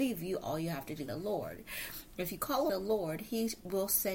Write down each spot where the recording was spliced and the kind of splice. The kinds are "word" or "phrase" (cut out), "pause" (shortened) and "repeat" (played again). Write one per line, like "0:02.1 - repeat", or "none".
0:01.1 - phrase
0:02.7 - word